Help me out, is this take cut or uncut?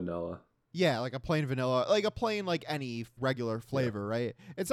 cut